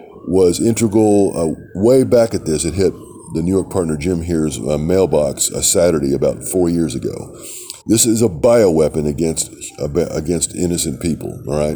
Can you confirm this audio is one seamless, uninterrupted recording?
no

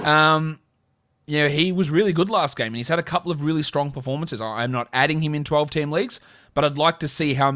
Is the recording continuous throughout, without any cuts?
yes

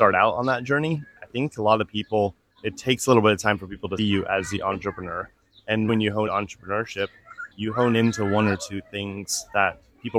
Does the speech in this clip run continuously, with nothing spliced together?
no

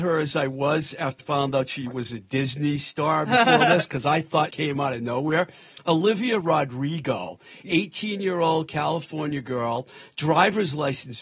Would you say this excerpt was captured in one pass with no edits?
no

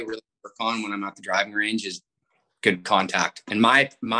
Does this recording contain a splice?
no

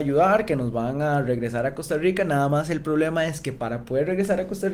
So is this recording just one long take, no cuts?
yes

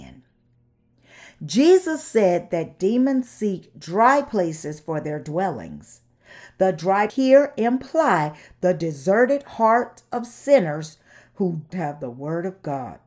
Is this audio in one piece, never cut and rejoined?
no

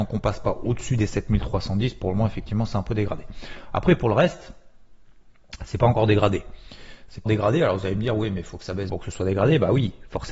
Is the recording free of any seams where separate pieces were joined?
no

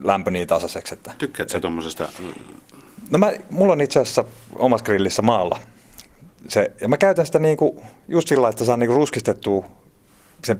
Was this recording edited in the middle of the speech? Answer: no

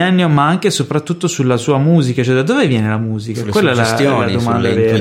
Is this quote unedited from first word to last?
yes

